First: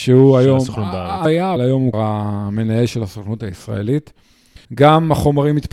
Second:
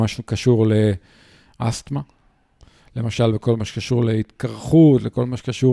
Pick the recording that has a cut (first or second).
first